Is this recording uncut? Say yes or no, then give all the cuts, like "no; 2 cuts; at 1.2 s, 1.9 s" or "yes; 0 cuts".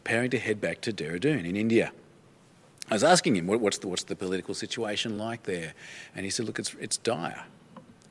yes; 0 cuts